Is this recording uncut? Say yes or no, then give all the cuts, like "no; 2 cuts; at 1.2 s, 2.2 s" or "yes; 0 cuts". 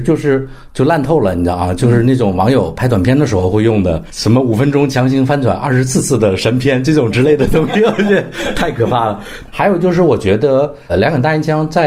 no; 1 cut; at 10.9 s